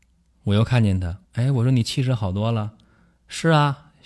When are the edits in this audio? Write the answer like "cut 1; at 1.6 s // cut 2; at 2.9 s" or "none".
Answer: cut 1; at 1.2 s